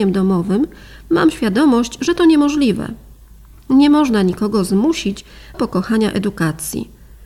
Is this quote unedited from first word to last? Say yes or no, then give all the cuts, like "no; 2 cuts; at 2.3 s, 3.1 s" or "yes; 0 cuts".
no; 1 cut; at 5.5 s